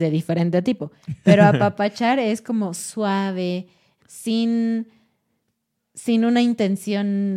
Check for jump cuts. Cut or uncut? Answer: cut